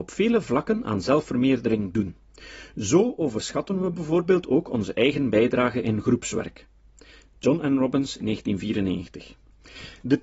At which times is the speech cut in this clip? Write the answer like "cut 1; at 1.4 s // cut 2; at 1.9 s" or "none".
none